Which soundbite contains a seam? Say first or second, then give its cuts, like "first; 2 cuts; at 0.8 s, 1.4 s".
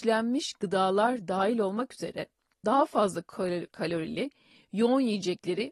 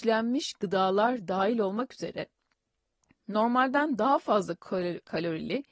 first; 1 cut; at 2.6 s